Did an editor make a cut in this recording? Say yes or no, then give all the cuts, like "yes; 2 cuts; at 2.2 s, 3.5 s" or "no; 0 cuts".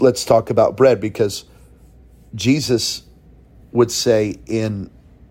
no; 0 cuts